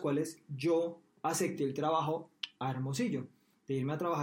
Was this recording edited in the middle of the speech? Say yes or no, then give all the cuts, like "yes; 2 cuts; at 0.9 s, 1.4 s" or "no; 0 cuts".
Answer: no; 0 cuts